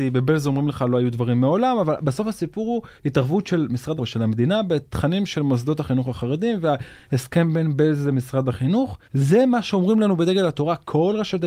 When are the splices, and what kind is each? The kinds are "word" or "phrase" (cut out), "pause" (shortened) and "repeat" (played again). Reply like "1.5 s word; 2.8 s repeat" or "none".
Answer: 3.0 s pause; 4.0 s word; 9.0 s pause